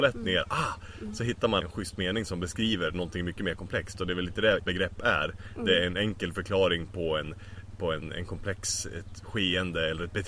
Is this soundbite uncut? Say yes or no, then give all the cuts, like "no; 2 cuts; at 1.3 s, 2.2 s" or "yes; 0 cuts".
no; 2 cuts; at 1.6 s, 4.6 s